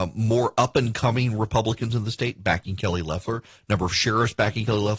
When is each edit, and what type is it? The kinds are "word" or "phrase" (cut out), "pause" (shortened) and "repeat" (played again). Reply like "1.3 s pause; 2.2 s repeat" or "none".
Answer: none